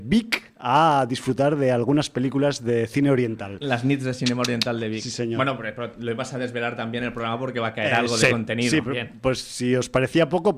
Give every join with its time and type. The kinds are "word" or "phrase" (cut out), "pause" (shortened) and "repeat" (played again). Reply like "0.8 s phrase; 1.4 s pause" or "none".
8.8 s word